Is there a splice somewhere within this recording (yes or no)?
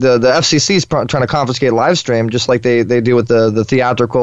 no